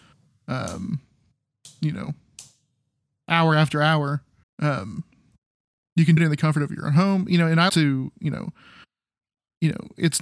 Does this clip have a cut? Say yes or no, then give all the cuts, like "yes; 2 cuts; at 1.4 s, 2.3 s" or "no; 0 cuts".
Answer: yes; 3 cuts; at 4.4 s, 6.2 s, 7.7 s